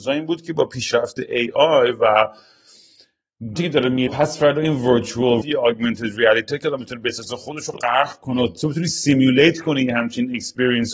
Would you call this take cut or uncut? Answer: cut